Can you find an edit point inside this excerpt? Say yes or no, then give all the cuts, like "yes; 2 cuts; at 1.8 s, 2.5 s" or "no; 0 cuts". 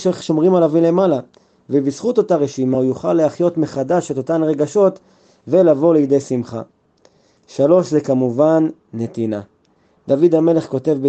no; 0 cuts